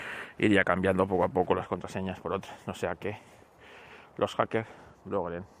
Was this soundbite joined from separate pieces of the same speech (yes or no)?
no